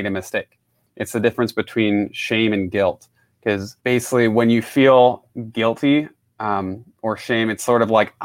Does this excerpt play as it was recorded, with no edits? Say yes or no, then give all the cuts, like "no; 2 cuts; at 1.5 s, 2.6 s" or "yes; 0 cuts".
no; 1 cut; at 3.8 s